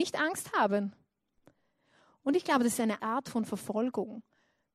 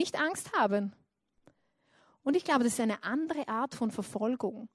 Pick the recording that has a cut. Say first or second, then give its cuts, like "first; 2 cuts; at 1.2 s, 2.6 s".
first; 1 cut; at 3.0 s